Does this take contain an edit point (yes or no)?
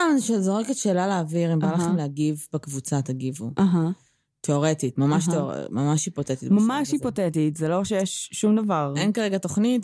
no